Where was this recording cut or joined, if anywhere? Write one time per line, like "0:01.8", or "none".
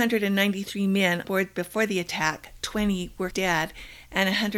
0:01.2
0:03.3